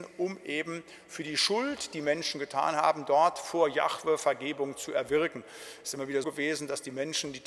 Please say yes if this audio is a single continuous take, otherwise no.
no